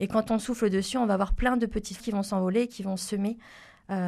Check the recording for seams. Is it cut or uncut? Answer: cut